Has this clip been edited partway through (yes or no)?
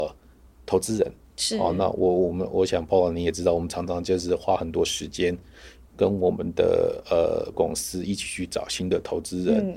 yes